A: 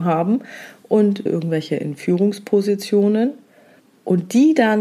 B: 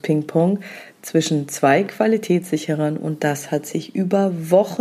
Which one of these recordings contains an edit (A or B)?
A